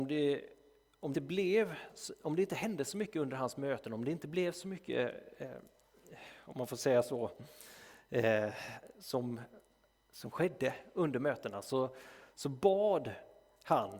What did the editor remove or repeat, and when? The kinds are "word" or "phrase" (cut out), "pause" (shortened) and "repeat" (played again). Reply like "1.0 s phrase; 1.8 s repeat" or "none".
1.1 s word